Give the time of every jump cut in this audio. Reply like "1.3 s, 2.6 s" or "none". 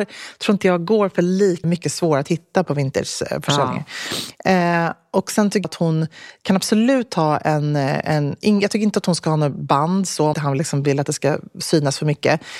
1.6 s, 2.6 s, 5.6 s, 10.3 s